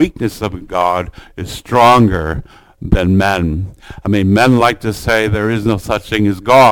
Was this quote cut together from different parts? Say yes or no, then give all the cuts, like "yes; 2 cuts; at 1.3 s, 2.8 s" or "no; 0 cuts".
no; 0 cuts